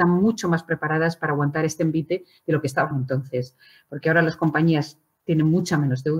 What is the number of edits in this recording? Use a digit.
0